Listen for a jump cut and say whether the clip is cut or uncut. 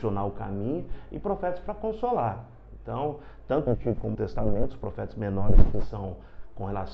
cut